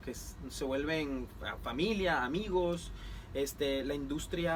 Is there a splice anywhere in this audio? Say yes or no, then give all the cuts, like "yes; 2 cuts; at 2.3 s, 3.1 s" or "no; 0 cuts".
no; 0 cuts